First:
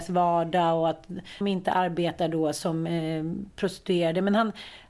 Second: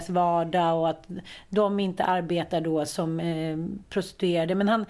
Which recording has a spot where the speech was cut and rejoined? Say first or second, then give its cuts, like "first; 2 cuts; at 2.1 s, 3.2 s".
first; 1 cut; at 1.4 s